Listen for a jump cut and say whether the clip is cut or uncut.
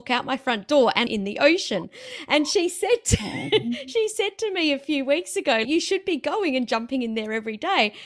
cut